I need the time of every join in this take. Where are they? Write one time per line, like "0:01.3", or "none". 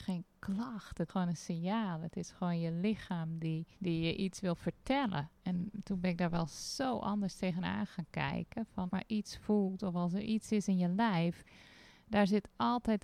0:01.1
0:03.7
0:05.4
0:08.9